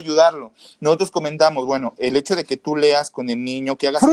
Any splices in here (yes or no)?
no